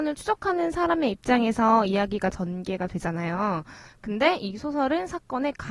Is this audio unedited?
yes; 0 cuts

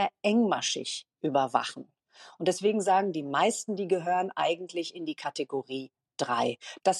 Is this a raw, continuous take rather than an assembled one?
yes; 0 cuts

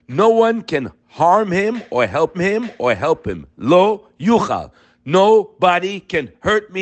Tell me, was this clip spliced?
yes; 1 cut; at 2.3 s

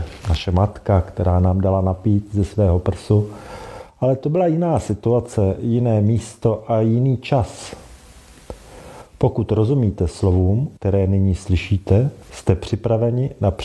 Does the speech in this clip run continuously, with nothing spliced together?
no; 2 cuts; at 10.8 s, 12.2 s

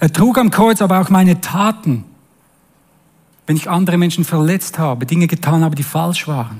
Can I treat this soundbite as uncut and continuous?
yes; 0 cuts

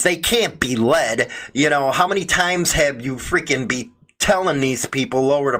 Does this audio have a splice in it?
no; 0 cuts

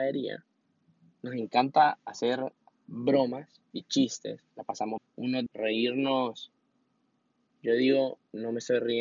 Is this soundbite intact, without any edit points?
no; 3 cuts; at 3.7 s, 5.0 s, 5.5 s

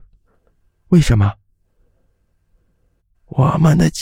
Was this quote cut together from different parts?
no; 0 cuts

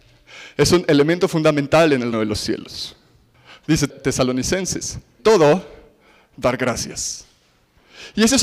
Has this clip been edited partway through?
yes; 2 cuts; at 2.1 s, 5.2 s

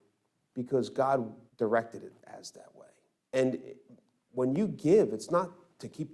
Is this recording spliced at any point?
yes; 2 cuts; at 1.5 s, 3.2 s

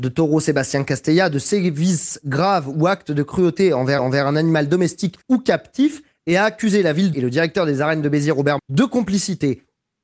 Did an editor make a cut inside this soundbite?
yes; 4 cuts; at 4.0 s, 5.2 s, 7.1 s, 8.6 s

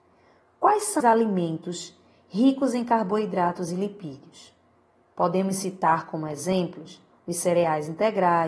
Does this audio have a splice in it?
yes; 1 cut; at 1.0 s

